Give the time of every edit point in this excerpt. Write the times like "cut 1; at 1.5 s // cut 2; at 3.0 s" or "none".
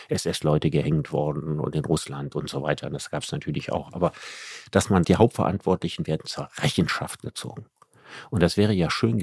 cut 1; at 5.0 s